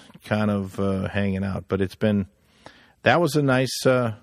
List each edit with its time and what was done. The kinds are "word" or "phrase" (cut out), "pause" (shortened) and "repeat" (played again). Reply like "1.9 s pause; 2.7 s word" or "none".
none